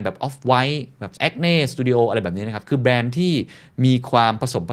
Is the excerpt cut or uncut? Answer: cut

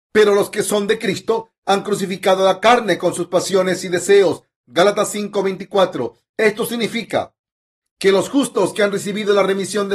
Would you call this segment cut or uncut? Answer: uncut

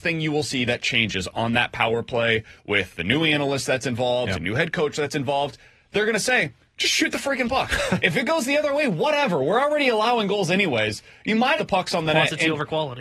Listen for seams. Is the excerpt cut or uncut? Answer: cut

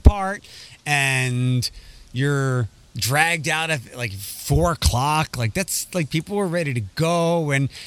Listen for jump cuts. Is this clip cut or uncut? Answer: uncut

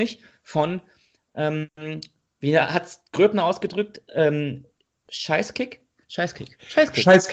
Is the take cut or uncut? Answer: uncut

